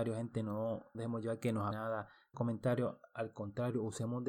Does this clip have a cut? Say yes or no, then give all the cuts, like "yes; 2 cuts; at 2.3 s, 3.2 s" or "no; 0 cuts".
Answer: yes; 3 cuts; at 0.9 s, 1.7 s, 2.3 s